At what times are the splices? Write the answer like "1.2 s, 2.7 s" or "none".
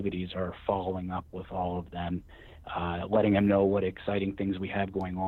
none